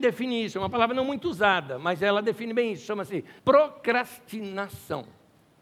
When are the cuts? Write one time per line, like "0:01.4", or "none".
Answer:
0:03.4